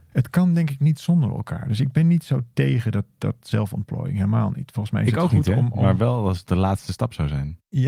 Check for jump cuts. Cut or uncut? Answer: uncut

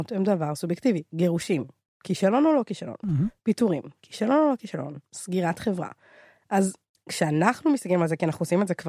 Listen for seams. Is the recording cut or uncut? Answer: uncut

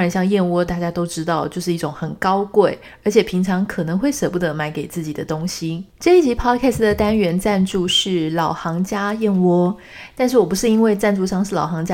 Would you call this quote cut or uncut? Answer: cut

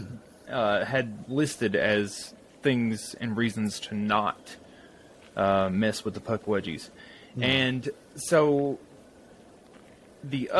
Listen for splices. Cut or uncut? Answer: uncut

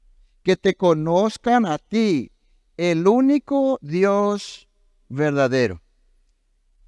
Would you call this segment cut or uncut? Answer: uncut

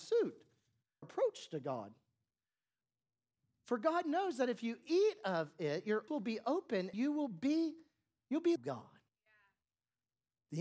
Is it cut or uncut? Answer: cut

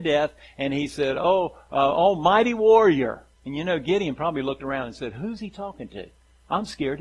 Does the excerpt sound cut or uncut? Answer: cut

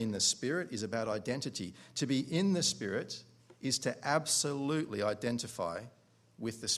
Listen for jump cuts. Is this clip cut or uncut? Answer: uncut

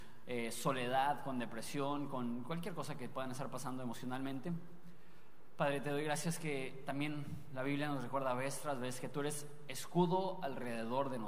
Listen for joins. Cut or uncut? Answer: uncut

